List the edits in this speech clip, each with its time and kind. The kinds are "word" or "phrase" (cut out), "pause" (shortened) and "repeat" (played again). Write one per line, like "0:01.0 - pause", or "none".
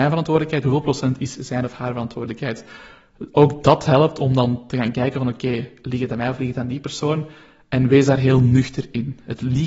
none